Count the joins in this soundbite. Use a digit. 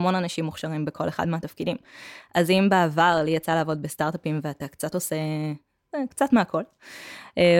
0